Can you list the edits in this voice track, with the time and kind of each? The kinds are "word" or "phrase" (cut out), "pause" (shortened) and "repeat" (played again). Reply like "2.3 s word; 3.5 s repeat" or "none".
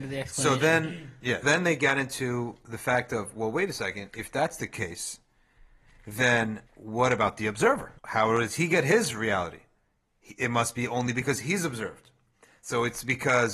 1.4 s word; 6.7 s pause; 8.0 s pause